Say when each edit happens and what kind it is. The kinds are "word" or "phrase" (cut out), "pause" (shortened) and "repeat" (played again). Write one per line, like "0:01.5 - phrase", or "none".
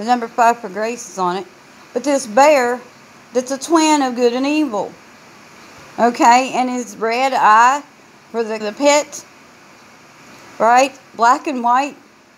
0:08.6 - phrase